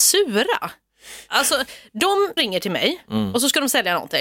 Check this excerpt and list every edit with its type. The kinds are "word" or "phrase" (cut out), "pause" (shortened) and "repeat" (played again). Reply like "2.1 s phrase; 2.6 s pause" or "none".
2.4 s word

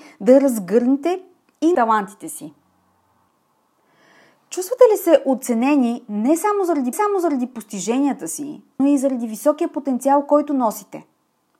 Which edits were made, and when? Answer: 1.7 s word; 6.9 s repeat; 8.8 s word

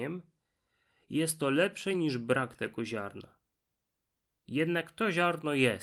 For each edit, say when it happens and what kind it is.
none

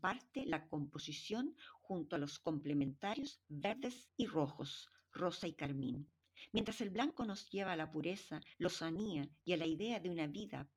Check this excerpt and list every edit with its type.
4.1 s pause

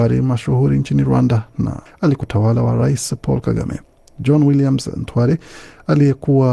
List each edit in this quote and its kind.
1.9 s word; 2.2 s word

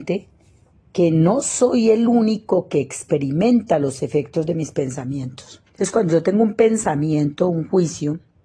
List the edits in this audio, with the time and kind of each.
5.7 s pause

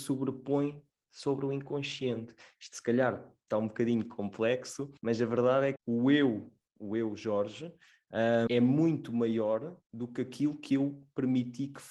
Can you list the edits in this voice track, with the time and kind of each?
5.0 s pause; 5.8 s word; 6.6 s pause; 8.5 s word; 9.8 s pause

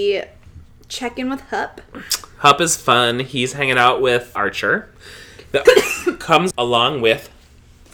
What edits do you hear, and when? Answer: 4.4 s word; 5.7 s word; 6.5 s word

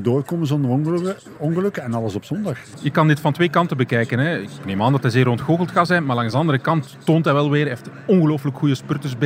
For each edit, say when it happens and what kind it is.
none

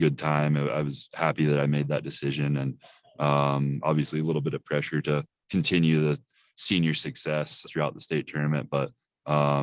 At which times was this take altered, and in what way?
7.6 s word

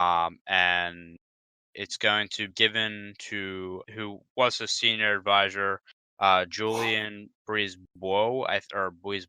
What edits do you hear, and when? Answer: 2.5 s word; 3.8 s word

